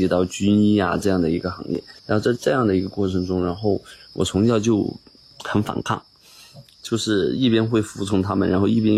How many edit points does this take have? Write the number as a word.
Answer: one